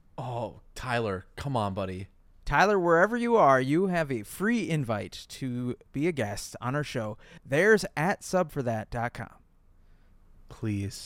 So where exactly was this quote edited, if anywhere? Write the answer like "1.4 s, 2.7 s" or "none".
none